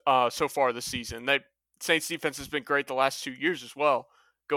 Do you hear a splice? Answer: no; 0 cuts

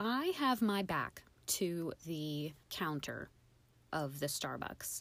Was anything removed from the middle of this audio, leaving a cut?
yes; 1 cut; at 2.6 s

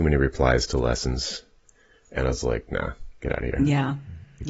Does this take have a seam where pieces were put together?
no; 0 cuts

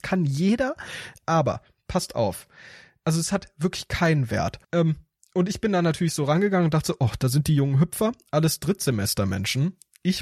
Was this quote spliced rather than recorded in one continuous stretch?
yes; 1 cut; at 4.6 s

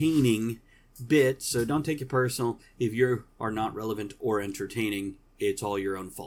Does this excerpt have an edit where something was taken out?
no; 0 cuts

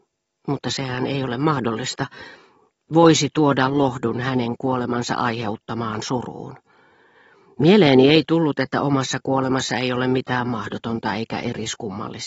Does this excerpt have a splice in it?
no; 0 cuts

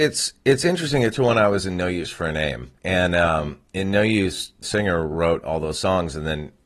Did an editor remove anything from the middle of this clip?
yes; 4 cuts; at 1.1 s, 2.8 s, 3.7 s, 4.6 s

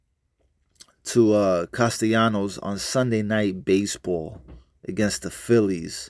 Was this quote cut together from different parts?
no; 0 cuts

